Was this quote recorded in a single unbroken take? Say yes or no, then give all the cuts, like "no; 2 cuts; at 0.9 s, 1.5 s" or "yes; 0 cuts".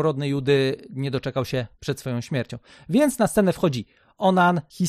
no; 1 cut; at 1.7 s